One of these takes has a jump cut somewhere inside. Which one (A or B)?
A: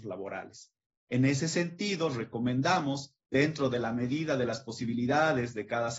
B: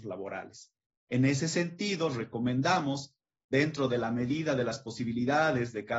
A